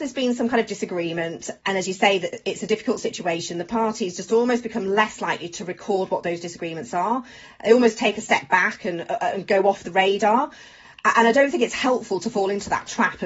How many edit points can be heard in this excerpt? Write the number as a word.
zero